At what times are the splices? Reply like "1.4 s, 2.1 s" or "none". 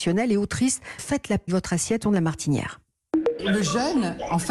1.0 s, 1.5 s, 2.0 s